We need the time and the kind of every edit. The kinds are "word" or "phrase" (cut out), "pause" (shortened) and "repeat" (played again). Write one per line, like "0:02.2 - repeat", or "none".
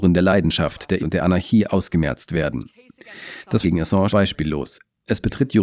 0:01.0 - word
0:03.6 - word
0:04.1 - word